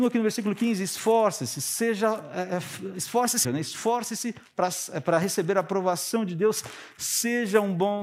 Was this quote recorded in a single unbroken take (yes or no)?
no